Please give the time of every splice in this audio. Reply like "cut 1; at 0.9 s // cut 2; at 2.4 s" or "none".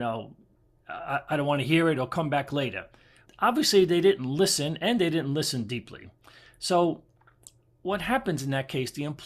cut 1; at 3.3 s